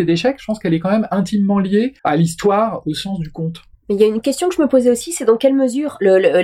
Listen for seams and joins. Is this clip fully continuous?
no; 1 cut; at 2.0 s

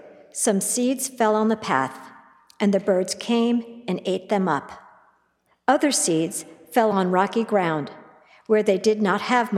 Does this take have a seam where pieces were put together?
no; 0 cuts

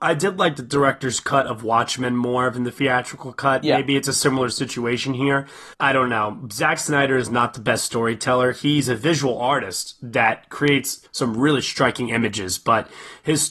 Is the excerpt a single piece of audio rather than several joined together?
no; 2 cuts; at 5.7 s, 11.1 s

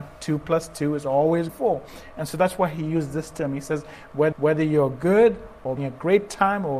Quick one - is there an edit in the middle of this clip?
yes; 3 cuts; at 1.5 s, 4.3 s, 5.8 s

